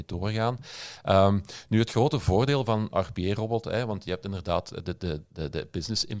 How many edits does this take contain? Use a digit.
1